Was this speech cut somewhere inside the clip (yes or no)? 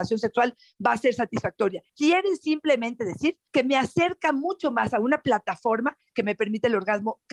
no